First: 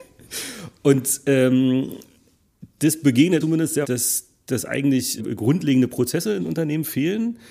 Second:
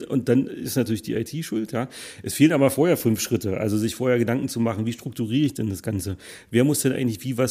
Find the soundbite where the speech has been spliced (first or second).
first